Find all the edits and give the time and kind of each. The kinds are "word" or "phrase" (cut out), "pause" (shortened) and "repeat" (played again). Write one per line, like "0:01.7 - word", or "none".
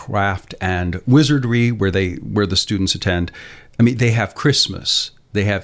none